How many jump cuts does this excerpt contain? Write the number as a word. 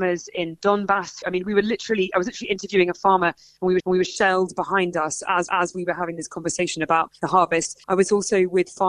five